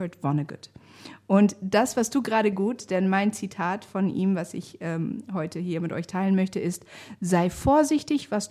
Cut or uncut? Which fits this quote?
cut